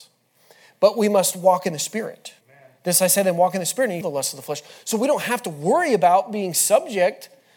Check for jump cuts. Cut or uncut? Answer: cut